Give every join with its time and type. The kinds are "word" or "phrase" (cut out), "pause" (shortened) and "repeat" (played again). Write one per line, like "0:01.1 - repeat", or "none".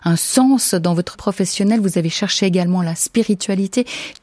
0:01.1 - word